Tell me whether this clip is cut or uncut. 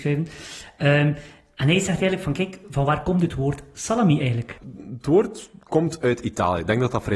uncut